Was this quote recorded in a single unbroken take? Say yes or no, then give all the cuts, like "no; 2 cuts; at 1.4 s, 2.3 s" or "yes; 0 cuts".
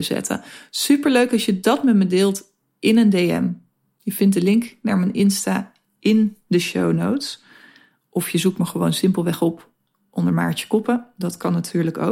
yes; 0 cuts